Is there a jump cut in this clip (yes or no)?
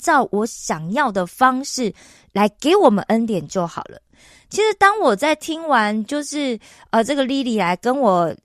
no